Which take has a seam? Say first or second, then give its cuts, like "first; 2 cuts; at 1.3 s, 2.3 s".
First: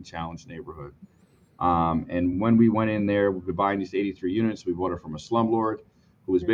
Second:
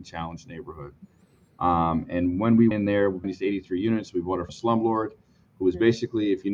second; 3 cuts; at 2.7 s, 3.2 s, 4.5 s